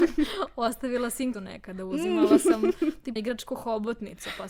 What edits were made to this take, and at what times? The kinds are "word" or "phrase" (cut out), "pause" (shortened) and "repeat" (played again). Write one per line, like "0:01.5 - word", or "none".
0:01.3 - word
0:03.2 - word